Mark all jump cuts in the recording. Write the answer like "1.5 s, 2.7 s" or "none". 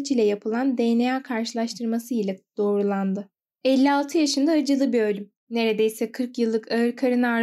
3.4 s, 5.4 s